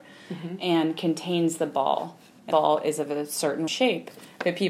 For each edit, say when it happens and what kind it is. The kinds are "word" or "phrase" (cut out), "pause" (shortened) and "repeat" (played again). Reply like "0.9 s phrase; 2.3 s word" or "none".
2.5 s word; 3.7 s word